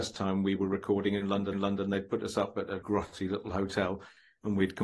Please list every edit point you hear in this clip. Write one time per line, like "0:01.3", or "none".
0:01.5
0:02.8